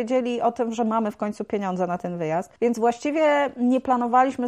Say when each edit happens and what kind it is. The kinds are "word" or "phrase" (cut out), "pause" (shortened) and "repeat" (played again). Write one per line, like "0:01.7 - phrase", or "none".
0:02.6 - pause